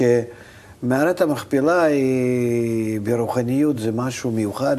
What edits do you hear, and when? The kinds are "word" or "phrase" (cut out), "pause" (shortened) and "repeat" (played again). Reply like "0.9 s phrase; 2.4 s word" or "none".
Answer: none